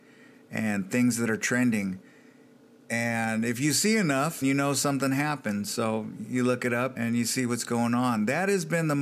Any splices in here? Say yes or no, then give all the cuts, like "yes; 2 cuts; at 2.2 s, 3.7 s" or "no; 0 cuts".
yes; 2 cuts; at 4.4 s, 7.0 s